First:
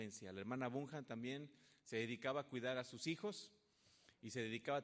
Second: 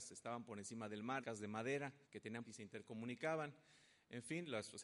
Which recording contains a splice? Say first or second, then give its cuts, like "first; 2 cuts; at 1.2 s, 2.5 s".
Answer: second; 3 cuts; at 1.2 s, 2.0 s, 2.4 s